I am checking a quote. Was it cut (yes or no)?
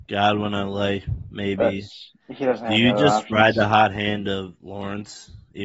yes